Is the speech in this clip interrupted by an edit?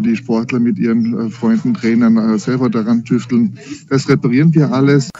no; 0 cuts

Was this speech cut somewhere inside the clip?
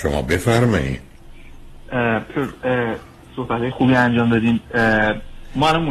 yes; 2 cuts; at 2.3 s, 3.7 s

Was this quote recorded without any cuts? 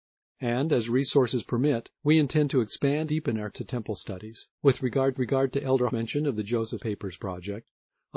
no; 7 cuts; at 1.9 s, 3.1 s, 3.5 s, 4.5 s, 5.1 s, 5.9 s, 6.8 s

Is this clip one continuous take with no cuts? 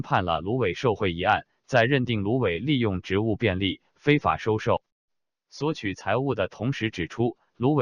yes; 0 cuts

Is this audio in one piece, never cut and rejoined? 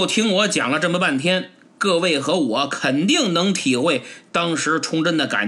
yes; 0 cuts

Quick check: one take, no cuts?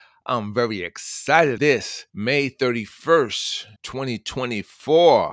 no; 3 cuts; at 1.6 s, 2.1 s, 3.8 s

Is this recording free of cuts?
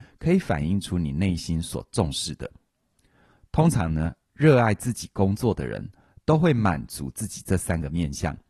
yes; 0 cuts

